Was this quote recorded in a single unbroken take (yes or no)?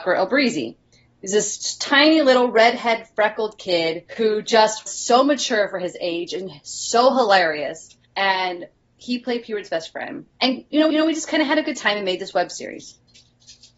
no